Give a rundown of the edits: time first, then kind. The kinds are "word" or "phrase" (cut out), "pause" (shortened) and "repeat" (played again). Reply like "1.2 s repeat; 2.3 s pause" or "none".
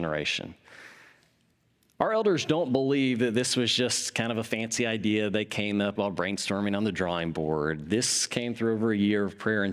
6.0 s word